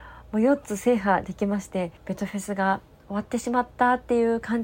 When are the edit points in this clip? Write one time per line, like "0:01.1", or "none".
0:02.0